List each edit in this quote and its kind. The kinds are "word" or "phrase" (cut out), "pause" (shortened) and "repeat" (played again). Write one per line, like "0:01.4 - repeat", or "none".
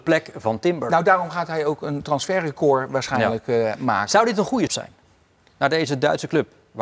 0:04.7 - word